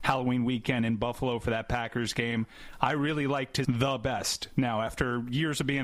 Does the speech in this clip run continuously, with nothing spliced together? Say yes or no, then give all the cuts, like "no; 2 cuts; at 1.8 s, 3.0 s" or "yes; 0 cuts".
no; 1 cut; at 3.6 s